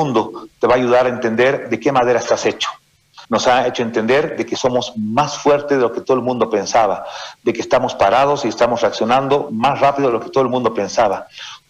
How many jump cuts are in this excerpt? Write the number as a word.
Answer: one